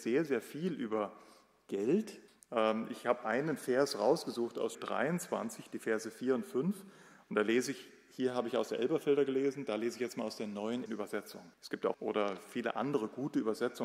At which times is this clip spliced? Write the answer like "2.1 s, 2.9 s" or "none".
2.3 s, 3.2 s, 4.7 s, 10.9 s, 11.5 s, 11.9 s